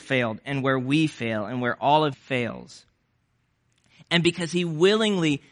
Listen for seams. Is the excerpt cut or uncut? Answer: cut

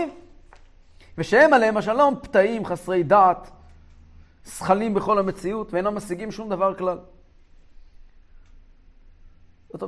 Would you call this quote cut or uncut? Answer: uncut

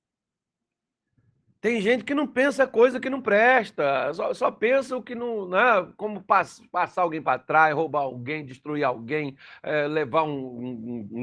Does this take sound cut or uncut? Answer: uncut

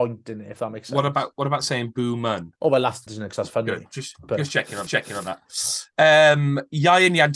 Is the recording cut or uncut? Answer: cut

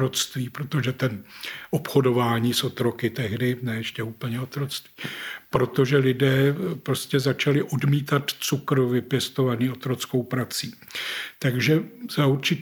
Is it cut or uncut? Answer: uncut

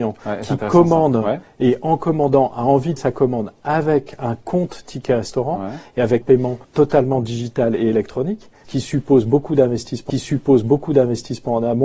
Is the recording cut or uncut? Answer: cut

